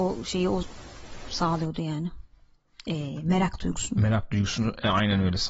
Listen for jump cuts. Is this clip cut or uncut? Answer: uncut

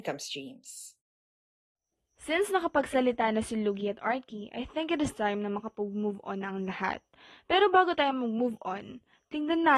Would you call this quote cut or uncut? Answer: uncut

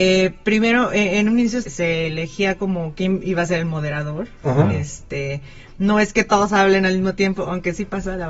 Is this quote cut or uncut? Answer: cut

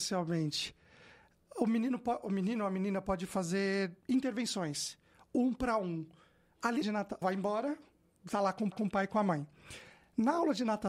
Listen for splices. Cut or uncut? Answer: cut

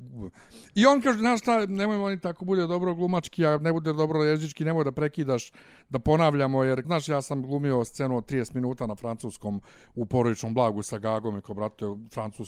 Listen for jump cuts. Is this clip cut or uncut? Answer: cut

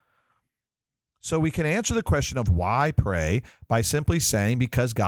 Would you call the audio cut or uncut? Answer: uncut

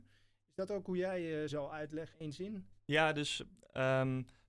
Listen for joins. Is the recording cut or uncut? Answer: cut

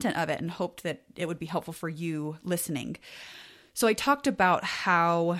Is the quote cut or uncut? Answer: uncut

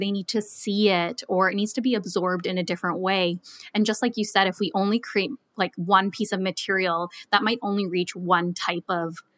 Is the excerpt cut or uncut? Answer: uncut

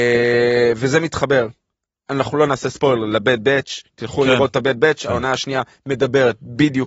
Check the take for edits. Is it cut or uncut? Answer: uncut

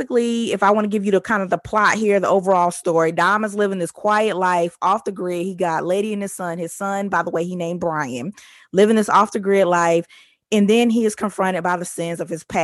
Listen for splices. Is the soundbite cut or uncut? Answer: uncut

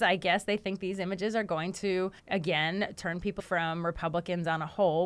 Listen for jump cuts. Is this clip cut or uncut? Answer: cut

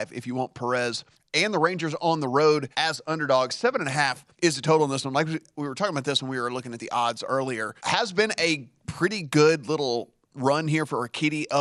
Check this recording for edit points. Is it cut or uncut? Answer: cut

